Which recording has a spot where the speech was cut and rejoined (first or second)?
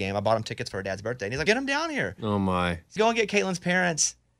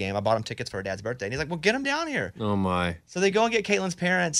first